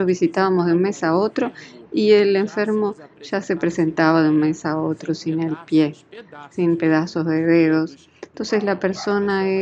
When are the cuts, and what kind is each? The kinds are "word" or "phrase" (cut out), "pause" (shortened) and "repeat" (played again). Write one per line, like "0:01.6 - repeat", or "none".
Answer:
none